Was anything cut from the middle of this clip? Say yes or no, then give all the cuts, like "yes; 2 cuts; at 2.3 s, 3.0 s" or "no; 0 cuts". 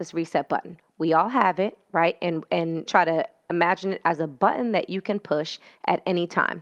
yes; 2 cuts; at 2.9 s, 3.5 s